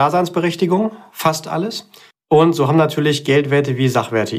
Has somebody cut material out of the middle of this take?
yes; 1 cut; at 2.1 s

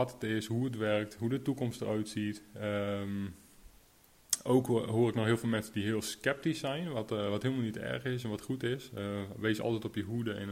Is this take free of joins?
yes; 0 cuts

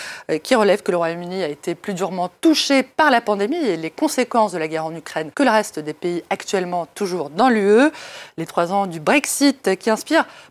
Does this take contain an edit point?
yes; 1 cut; at 5.3 s

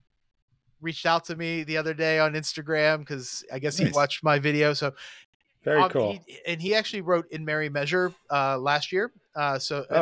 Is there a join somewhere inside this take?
no; 0 cuts

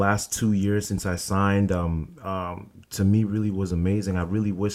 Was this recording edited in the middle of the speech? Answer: no; 0 cuts

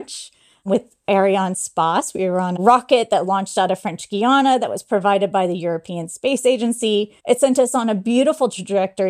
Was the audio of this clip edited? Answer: yes; 2 cuts; at 2.6 s, 7.2 s

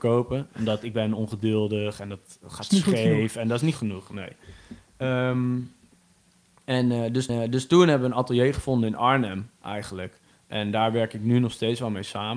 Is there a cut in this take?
yes; 2 cuts; at 3.8 s, 7.3 s

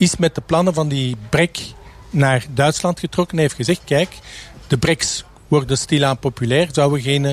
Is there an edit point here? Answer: no; 0 cuts

